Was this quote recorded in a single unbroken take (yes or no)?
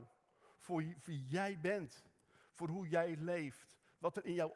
yes